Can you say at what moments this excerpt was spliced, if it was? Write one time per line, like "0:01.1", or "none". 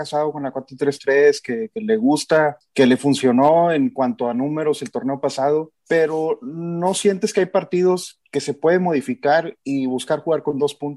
0:05.8
0:08.2